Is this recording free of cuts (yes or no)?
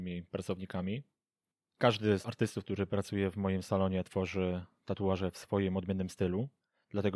yes